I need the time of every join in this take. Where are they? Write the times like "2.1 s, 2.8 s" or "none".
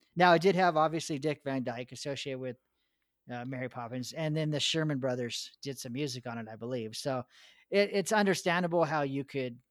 none

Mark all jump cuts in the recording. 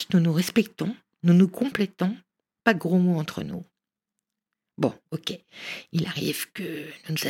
none

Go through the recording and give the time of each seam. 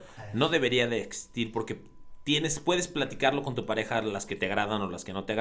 4.3 s

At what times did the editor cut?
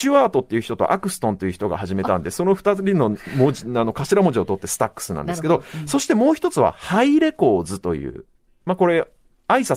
none

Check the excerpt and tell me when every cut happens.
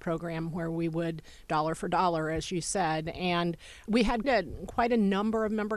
1.5 s, 3.8 s, 4.2 s

